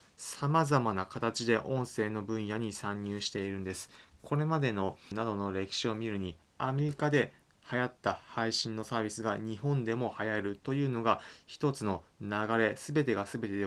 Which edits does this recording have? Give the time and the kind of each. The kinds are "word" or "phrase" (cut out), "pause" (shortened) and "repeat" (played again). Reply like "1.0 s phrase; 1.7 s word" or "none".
5.1 s word